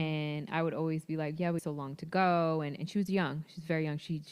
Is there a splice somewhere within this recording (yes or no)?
yes